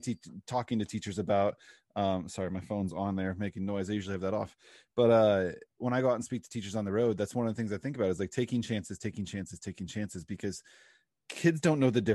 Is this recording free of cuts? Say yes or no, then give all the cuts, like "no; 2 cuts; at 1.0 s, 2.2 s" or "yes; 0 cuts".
yes; 0 cuts